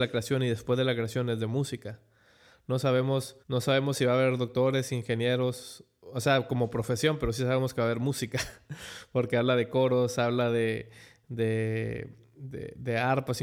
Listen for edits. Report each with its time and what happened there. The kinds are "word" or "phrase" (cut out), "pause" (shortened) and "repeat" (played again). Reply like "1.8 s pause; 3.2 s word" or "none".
3.4 s pause